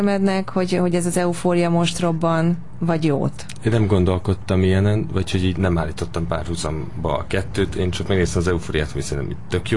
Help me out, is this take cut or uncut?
cut